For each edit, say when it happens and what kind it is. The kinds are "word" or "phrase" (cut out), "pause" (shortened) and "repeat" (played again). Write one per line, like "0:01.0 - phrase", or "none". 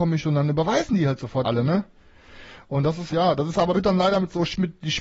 0:01.4 - word
0:03.1 - word
0:03.7 - word

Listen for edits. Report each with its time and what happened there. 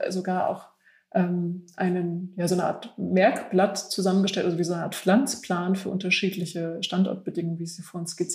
none

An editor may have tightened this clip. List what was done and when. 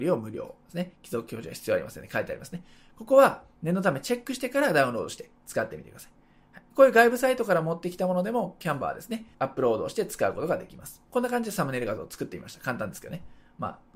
0:06.7 - pause
0:09.3 - pause
0:11.0 - pause

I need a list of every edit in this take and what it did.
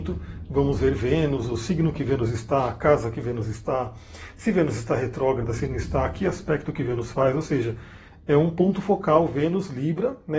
none

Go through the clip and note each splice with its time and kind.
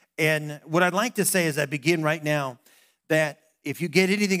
none

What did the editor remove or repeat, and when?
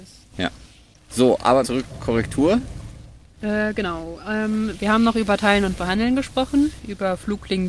0:01.6 - word

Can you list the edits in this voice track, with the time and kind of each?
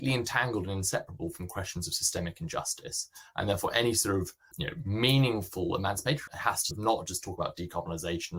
0:04.5 - word
0:06.3 - word
0:06.7 - word

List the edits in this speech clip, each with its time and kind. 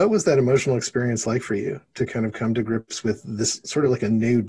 none

